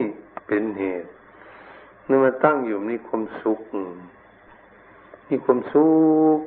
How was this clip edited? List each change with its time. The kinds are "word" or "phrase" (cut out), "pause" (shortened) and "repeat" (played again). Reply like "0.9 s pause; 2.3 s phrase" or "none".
none